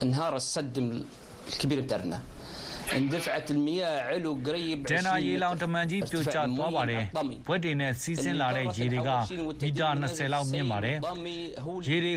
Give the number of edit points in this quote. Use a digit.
1